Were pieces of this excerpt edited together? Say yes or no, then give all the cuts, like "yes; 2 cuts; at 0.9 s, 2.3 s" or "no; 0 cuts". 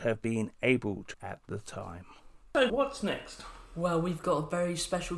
yes; 2 cuts; at 1.1 s, 2.7 s